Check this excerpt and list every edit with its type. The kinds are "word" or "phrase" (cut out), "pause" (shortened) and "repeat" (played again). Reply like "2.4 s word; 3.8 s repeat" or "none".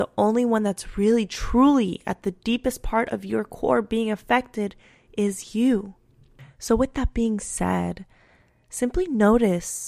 none